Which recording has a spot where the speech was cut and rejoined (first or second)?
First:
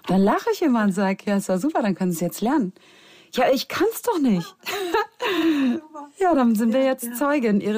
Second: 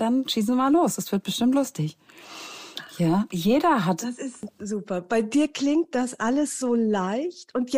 second